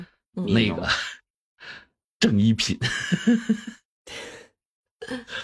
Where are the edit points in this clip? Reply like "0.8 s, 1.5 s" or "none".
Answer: none

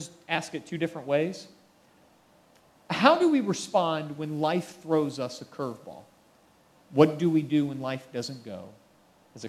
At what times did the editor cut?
none

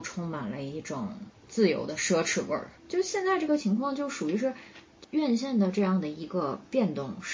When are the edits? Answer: 1.4 s, 2.8 s

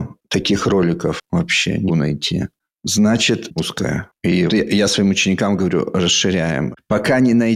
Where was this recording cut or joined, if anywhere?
1.9 s, 3.6 s, 4.5 s

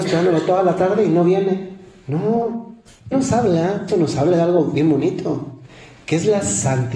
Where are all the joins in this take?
3.1 s, 3.9 s

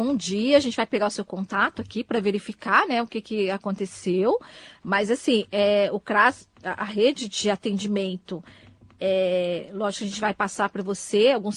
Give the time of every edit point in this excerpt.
none

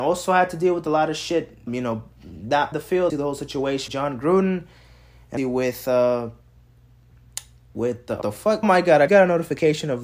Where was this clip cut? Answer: 1.7 s, 2.7 s, 3.1 s, 3.9 s, 5.4 s, 8.2 s, 8.6 s, 9.1 s

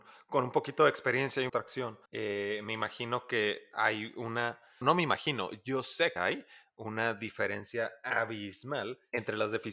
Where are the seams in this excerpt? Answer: 1.5 s, 2.0 s, 4.8 s, 6.2 s

